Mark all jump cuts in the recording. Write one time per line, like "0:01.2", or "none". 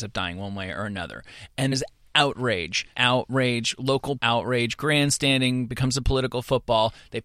0:01.7
0:02.9
0:04.2